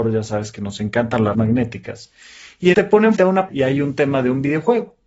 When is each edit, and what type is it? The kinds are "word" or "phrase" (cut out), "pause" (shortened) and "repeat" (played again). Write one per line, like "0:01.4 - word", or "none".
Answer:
0:01.3 - word
0:02.7 - word
0:03.2 - word
0:03.5 - word